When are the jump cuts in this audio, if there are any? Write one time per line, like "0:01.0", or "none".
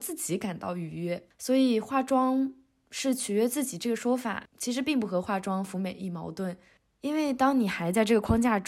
none